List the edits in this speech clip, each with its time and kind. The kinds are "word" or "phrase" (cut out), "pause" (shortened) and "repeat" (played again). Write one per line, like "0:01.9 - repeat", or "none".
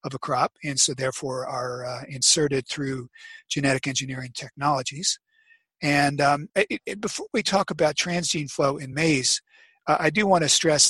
none